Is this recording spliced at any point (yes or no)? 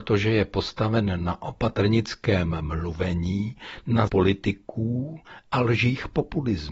yes